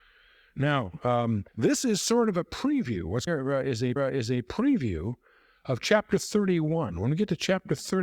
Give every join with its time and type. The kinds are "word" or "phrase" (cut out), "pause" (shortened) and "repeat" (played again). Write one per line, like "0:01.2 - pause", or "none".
0:01.5 - pause
0:03.3 - word
0:04.0 - repeat

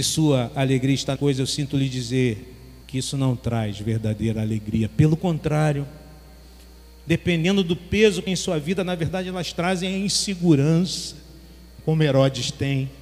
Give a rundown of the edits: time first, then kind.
0:01.2 - word
0:02.8 - pause
0:05.2 - phrase
0:08.3 - phrase

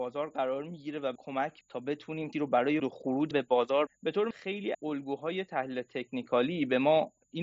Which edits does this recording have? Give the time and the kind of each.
0:01.2 - word
0:01.6 - word
0:02.3 - word
0:02.8 - word
0:03.3 - word
0:03.9 - word
0:04.3 - word
0:04.7 - word

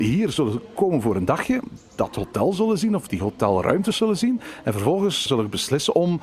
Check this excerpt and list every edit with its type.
0:03.1 - word
0:05.3 - word

